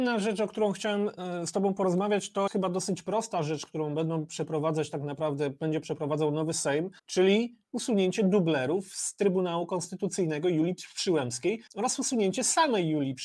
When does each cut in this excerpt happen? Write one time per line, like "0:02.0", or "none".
0:02.5
0:07.0
0:11.7